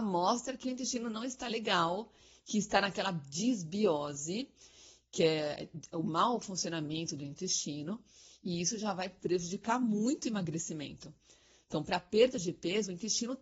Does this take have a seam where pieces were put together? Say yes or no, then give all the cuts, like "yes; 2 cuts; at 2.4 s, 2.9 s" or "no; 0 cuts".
no; 0 cuts